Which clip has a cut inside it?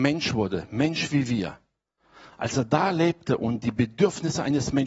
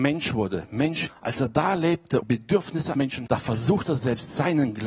second; 5 cuts; at 1.1 s, 2.2 s, 2.9 s, 3.3 s, 4.0 s

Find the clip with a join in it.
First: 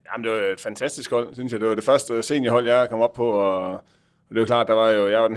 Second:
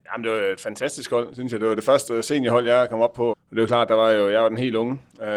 second; 1 cut; at 3.3 s

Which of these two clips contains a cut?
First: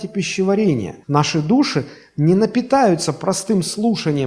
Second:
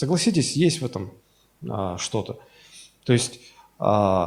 first; 1 cut; at 1.0 s

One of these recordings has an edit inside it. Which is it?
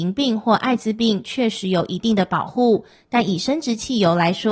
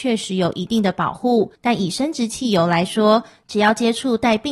second; 1 cut; at 1.5 s

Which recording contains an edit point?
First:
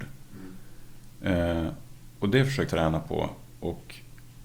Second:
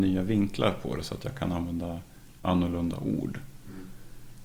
first; 1 cut; at 2.7 s

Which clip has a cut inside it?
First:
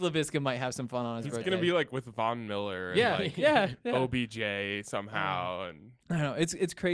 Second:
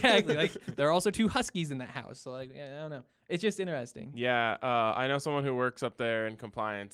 first; 1 cut; at 6.0 s

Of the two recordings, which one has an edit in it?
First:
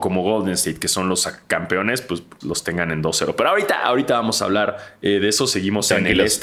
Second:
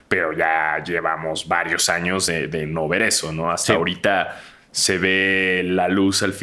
first; 1 cut; at 2.4 s

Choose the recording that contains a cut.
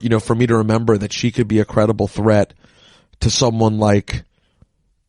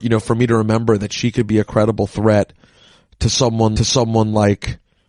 second; 1 cut; at 3.8 s

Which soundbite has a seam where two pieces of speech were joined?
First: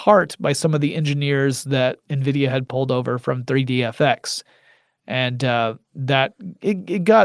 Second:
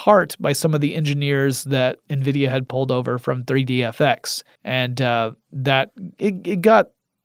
second; 1 cut; at 4.6 s

